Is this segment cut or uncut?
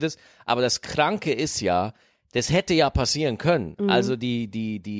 uncut